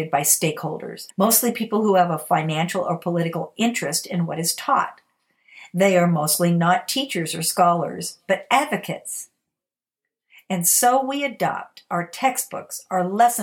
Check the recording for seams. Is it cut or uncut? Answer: cut